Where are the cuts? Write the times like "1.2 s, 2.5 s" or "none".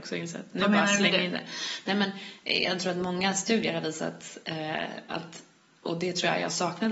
none